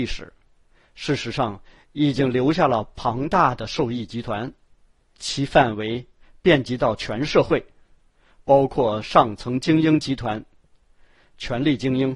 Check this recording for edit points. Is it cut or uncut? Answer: uncut